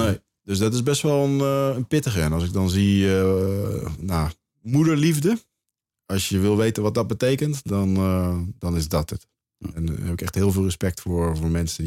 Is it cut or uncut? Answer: uncut